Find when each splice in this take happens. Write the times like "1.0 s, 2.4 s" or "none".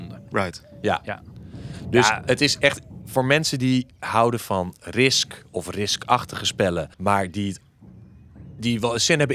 6.9 s